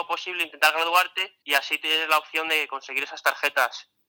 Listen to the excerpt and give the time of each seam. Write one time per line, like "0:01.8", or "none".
0:01.4